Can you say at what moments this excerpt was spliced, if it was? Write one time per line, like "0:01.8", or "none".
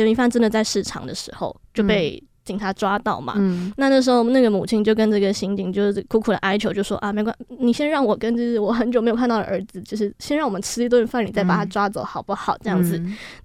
none